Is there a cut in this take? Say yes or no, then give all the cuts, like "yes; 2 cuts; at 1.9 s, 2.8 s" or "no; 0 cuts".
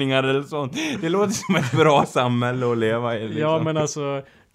no; 0 cuts